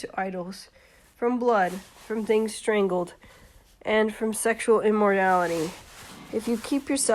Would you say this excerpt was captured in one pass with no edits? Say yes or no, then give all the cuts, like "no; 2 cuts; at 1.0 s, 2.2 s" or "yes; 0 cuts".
yes; 0 cuts